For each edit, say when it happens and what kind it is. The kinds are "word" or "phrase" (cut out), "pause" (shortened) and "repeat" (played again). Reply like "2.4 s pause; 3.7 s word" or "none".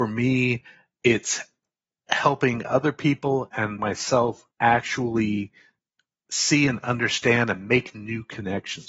3.8 s word; 4.5 s pause